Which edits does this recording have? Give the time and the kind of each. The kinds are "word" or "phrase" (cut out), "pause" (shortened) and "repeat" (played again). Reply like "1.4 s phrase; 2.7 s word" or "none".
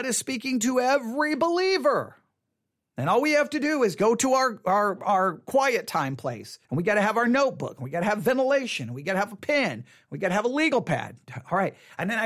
6.6 s pause

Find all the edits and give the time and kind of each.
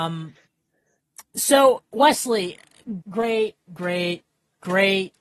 1.3 s pause; 3.0 s word

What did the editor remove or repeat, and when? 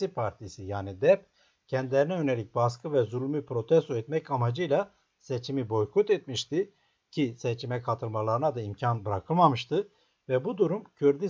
none

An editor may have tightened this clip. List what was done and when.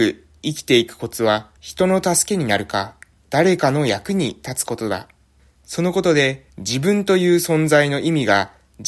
1.6 s pause; 3.2 s pause; 5.4 s pause; 6.5 s pause

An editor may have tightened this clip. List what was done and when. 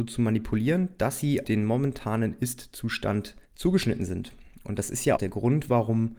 1.4 s word; 3.4 s pause; 5.2 s word

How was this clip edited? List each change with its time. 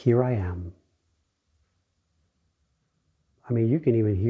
none

